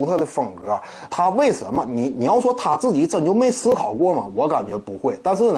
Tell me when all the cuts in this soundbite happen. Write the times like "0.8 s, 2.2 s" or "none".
1.1 s